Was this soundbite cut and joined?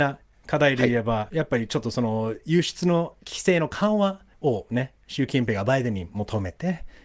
yes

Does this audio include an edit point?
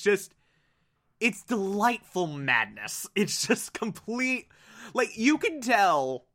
no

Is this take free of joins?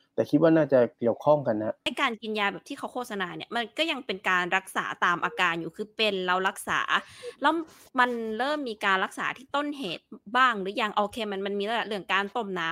yes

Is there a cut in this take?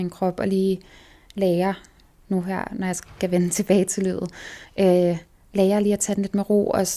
no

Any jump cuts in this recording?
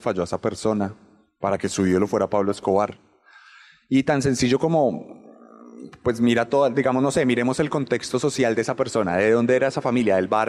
no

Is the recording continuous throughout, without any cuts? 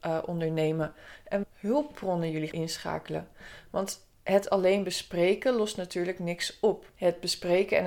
no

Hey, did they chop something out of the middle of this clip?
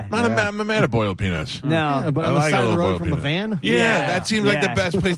no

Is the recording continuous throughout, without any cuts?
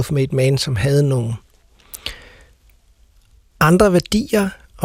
yes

